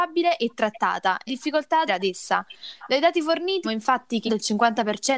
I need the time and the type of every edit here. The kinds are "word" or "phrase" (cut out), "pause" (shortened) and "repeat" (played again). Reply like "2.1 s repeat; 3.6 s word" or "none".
1.3 s word; 1.9 s word; 3.6 s word; 4.3 s word